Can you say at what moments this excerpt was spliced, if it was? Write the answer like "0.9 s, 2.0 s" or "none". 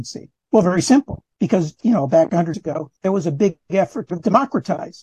1.3 s, 2.5 s, 3.0 s, 4.1 s